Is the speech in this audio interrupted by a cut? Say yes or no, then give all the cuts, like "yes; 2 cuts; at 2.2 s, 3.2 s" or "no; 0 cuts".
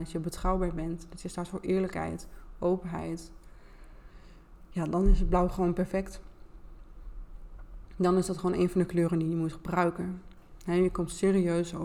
no; 0 cuts